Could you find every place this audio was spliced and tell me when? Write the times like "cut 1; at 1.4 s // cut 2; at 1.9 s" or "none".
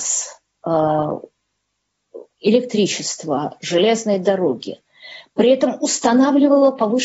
cut 1; at 2.3 s